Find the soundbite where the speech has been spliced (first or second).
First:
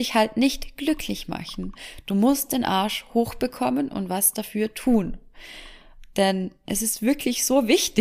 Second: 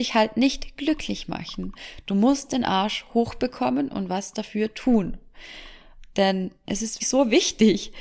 second